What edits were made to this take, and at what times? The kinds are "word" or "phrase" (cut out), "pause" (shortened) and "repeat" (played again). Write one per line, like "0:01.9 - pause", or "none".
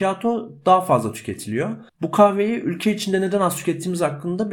0:01.9 - pause